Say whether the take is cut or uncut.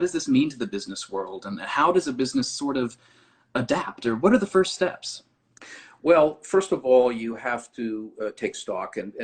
uncut